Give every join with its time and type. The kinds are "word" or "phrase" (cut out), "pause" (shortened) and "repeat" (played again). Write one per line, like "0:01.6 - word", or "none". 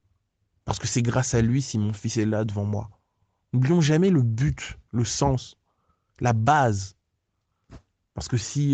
none